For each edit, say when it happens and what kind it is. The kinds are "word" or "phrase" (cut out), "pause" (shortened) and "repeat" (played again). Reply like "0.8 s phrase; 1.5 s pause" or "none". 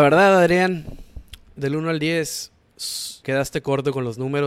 3.2 s word

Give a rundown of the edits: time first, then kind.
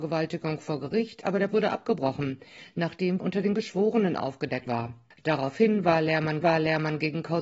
1.5 s word; 3.2 s word; 4.7 s word; 6.4 s repeat

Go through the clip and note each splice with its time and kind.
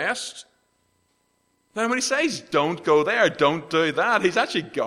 none

